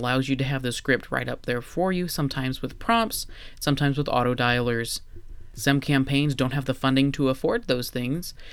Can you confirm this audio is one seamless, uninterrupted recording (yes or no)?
yes